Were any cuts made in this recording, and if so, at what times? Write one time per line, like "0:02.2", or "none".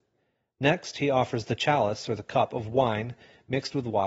none